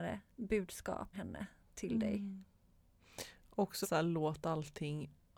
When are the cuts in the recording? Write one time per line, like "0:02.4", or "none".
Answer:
0:01.1
0:03.8